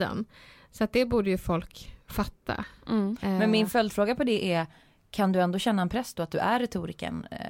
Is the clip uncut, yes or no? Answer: yes